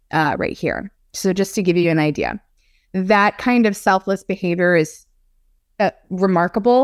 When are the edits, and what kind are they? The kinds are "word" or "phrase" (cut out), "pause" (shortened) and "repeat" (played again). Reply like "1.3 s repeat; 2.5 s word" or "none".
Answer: none